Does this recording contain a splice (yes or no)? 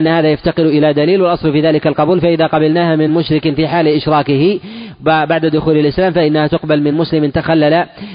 no